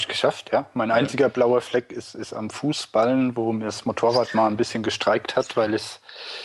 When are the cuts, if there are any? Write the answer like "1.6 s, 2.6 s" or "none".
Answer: none